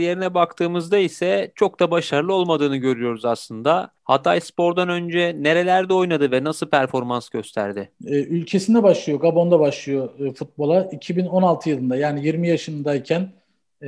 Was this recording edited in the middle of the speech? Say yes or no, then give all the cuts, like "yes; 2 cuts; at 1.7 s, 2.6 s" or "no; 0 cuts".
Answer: yes; 2 cuts; at 3.9 s, 8.0 s